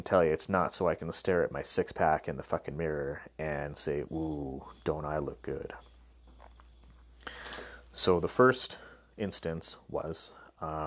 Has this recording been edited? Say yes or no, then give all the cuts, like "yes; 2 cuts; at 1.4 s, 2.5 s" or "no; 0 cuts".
no; 0 cuts